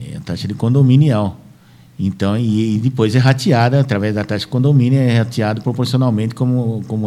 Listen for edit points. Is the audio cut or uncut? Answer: uncut